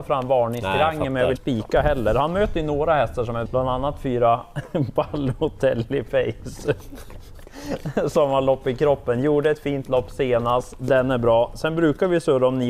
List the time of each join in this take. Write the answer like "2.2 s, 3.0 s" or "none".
1.4 s, 3.5 s